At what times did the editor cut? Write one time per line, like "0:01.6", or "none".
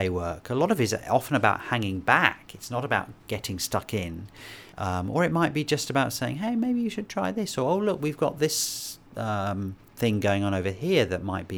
0:03.2
0:04.7
0:09.1